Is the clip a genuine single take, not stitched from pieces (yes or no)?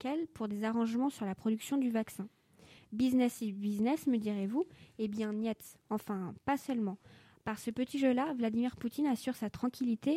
yes